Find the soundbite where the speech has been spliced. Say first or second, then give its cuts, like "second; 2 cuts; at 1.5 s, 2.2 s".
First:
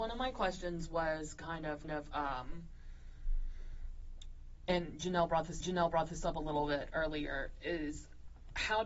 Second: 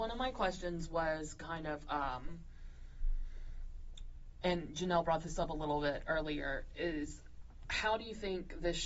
first; 2 cuts; at 1.8 s, 5.6 s